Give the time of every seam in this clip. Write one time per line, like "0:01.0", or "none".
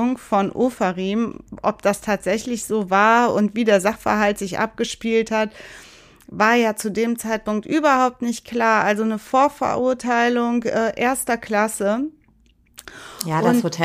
none

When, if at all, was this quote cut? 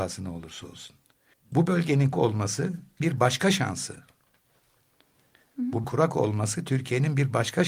0:01.3
0:02.1
0:03.0
0:05.8

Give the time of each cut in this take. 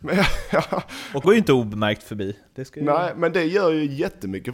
0:01.2

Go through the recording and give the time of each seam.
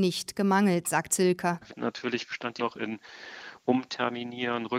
0:01.1
0:02.6

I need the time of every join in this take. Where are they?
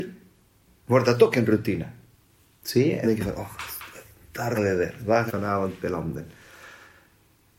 0:03.0
0:04.6
0:05.3

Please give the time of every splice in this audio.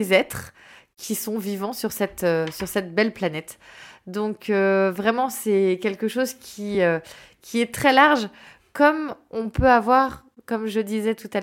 none

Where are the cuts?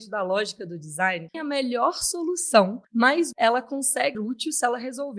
0:01.3
0:03.3
0:04.1

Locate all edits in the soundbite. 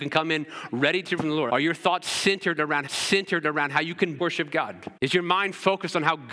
0:01.2
0:01.5
0:02.9
0:04.2
0:05.0

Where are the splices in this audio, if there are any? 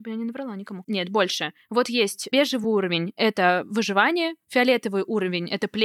none

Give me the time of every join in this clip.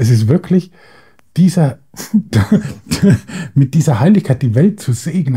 none

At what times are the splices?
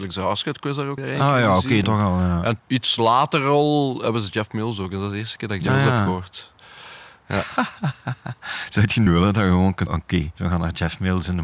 0:01.0
0:01.8
0:02.6
0:05.7
0:09.1
0:09.9
0:10.4

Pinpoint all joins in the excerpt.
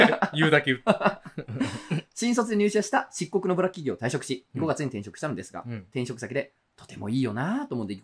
none

